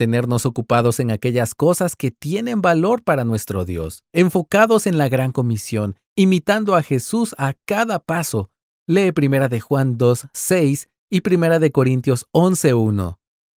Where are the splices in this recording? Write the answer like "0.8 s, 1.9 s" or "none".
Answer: none